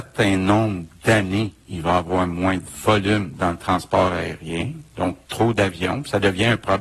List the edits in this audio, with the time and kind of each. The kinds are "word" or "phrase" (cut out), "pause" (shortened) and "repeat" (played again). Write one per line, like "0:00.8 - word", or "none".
0:05.2 - pause